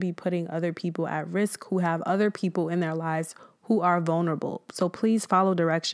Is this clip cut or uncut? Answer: uncut